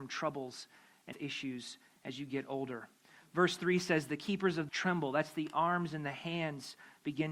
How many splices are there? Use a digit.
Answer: 2